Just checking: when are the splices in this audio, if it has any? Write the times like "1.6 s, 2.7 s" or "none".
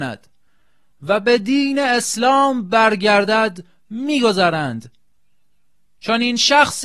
none